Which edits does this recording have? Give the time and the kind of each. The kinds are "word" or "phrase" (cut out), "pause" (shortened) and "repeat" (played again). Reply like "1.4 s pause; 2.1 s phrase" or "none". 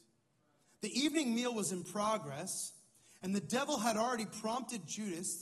none